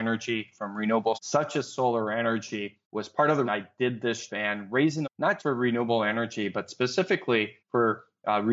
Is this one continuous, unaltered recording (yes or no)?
no